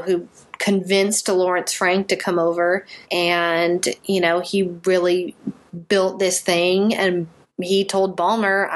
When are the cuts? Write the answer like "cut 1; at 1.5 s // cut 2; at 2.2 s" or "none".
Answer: cut 1; at 3.0 s // cut 2; at 7.4 s